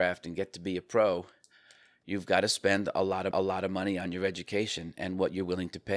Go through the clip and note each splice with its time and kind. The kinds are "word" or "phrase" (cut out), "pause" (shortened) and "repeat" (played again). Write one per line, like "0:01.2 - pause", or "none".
0:03.3 - repeat